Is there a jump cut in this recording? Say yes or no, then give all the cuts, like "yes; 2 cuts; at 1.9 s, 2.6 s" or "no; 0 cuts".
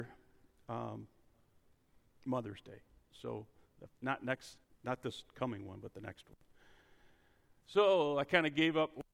yes; 2 cuts; at 3.9 s, 4.6 s